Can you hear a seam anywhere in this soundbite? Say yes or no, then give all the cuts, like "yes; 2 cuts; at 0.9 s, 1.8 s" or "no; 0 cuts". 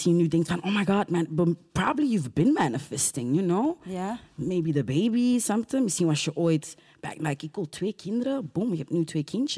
no; 0 cuts